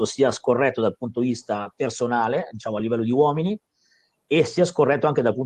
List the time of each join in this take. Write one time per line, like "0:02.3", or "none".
none